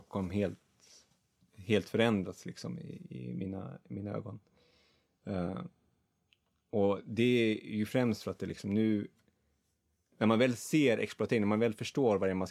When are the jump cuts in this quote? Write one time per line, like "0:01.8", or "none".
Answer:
none